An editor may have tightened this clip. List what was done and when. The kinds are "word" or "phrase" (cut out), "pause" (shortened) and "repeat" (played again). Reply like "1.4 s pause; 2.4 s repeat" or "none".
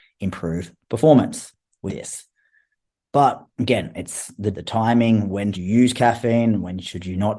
1.9 s word; 3.5 s pause; 4.5 s phrase; 5.5 s word